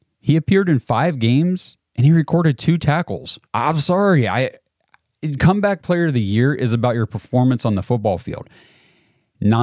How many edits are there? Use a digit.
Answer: 1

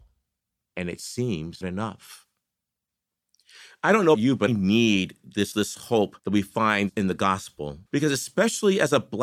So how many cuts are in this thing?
6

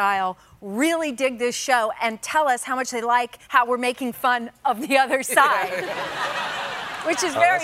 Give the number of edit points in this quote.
1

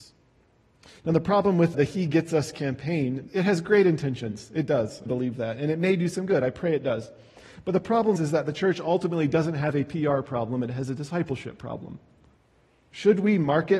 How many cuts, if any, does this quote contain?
5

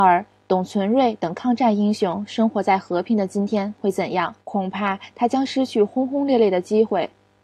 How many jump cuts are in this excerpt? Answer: 1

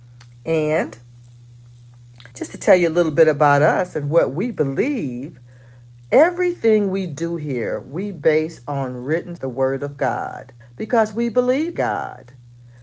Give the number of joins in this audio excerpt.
4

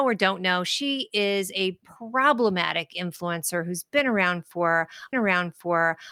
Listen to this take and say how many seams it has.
1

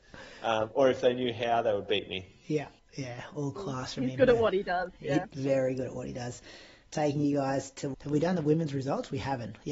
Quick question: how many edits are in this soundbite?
1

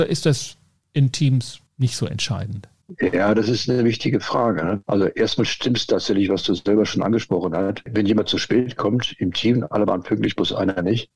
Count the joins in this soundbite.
0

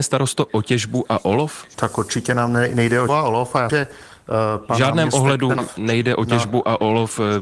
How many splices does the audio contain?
3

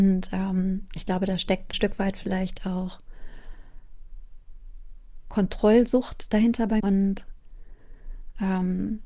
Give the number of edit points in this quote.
3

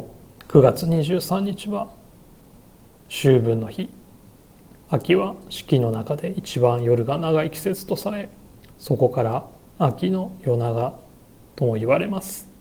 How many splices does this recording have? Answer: 2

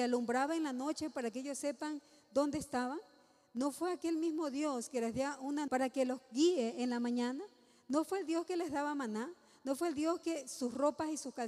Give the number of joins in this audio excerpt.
1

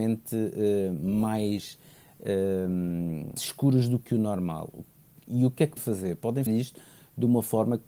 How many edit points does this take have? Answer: 3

